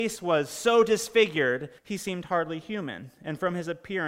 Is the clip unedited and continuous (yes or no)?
no